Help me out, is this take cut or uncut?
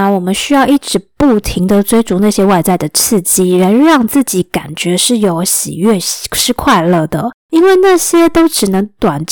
cut